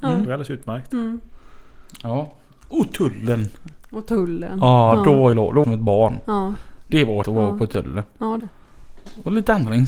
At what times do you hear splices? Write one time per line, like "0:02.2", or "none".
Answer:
0:05.3
0:05.6
0:07.2
0:08.4